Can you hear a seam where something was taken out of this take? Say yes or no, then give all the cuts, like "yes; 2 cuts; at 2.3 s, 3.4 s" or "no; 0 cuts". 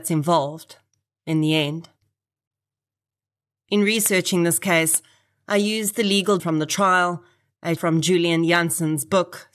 yes; 2 cuts; at 6.4 s, 7.8 s